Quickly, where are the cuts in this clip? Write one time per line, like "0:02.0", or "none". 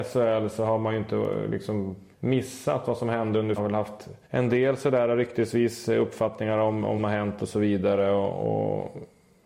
0:02.1
0:03.6
0:04.2
0:07.0